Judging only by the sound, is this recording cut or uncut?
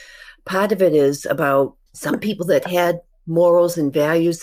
cut